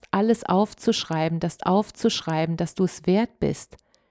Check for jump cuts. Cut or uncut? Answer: cut